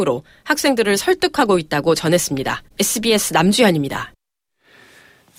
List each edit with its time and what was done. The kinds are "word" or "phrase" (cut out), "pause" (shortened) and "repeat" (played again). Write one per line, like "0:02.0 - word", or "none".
0:02.7 - pause